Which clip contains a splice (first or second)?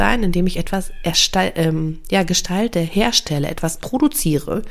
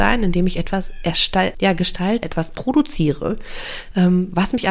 second